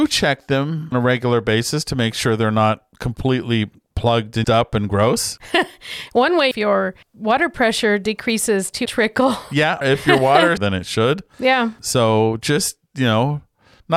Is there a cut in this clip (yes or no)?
yes